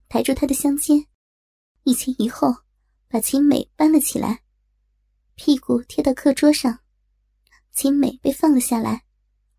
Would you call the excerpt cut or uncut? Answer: uncut